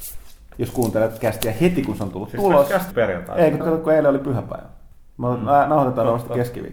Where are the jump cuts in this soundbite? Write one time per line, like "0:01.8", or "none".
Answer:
0:01.2
0:02.9
0:03.6

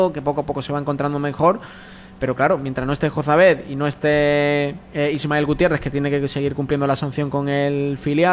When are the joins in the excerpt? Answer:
none

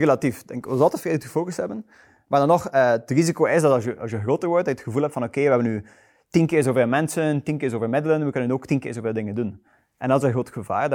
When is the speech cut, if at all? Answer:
none

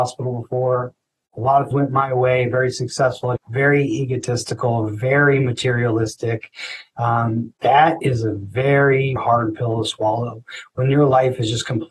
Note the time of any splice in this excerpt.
0:01.7
0:03.4
0:07.6
0:09.2

